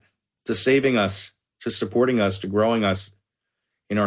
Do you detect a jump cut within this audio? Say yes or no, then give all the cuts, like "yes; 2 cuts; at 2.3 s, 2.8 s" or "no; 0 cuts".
no; 0 cuts